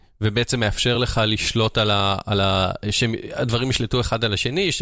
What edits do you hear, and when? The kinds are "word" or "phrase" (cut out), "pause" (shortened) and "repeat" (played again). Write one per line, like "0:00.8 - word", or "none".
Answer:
none